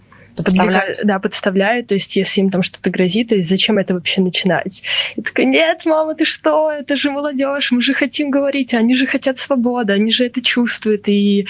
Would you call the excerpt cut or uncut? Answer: uncut